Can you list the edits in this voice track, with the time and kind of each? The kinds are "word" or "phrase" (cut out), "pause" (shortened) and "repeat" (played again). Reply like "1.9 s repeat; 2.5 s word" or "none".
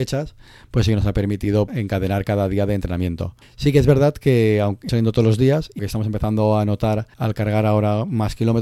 1.7 s word; 3.4 s pause; 4.9 s word; 5.8 s word; 7.1 s pause